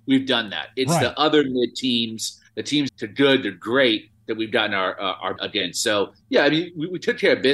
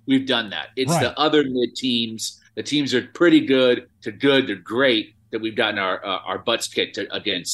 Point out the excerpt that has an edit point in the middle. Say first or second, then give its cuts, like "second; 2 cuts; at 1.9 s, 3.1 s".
first; 2 cuts; at 2.9 s, 5.4 s